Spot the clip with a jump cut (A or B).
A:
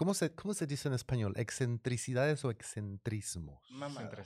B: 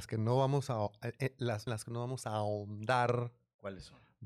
B